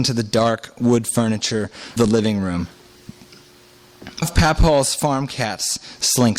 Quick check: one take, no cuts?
no; 2 cuts; at 2.0 s, 4.2 s

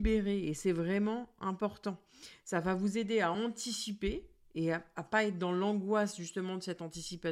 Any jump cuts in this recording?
no; 0 cuts

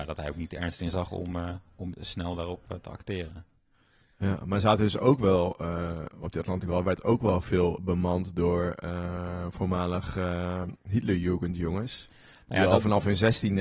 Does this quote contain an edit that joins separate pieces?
no; 0 cuts

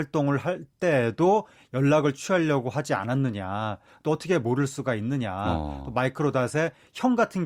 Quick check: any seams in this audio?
no; 0 cuts

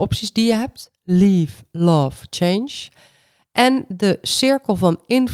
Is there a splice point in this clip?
no; 0 cuts

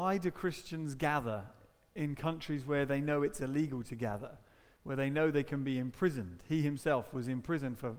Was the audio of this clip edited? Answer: no; 0 cuts

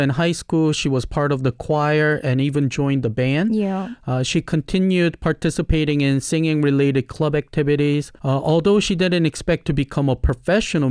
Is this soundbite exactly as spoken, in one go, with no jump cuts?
no; 1 cut; at 8.2 s

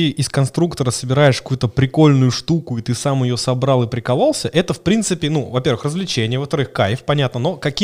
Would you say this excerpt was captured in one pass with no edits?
yes; 0 cuts

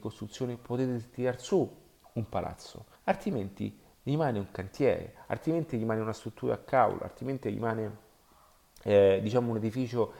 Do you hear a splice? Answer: yes; 1 cut; at 2.9 s

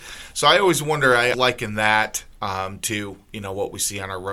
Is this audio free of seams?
no; 1 cut; at 1.3 s

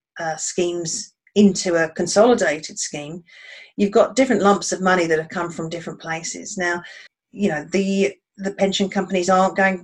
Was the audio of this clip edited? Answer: yes; 1 cut; at 7.1 s

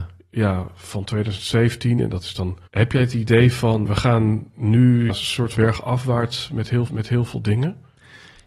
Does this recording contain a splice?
yes; 5 cuts; at 2.7 s, 3.8 s, 5.1 s, 5.5 s, 6.9 s

